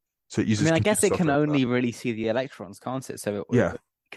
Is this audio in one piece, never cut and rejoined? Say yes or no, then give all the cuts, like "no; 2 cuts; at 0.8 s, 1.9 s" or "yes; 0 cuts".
yes; 0 cuts